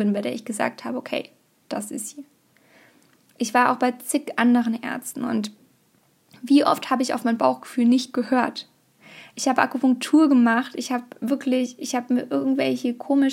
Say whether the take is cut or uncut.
uncut